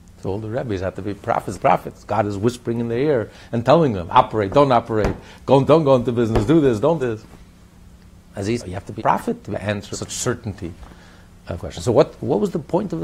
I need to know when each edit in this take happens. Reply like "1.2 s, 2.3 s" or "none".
1.5 s, 5.7 s, 7.0 s, 8.6 s, 9.0 s, 9.5 s, 9.9 s, 11.6 s